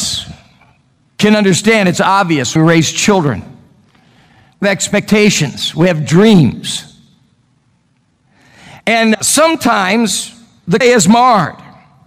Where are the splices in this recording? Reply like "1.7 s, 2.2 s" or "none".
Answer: 2.6 s, 4.6 s, 9.1 s, 10.8 s